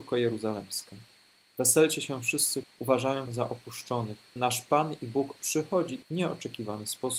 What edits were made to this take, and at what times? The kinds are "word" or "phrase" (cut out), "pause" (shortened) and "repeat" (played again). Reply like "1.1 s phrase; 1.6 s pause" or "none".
2.6 s word; 3.3 s word; 4.4 s word; 5.4 s word; 6.0 s word

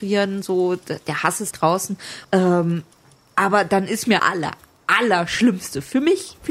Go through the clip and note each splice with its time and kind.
1.5 s word; 2.2 s pause; 4.2 s phrase

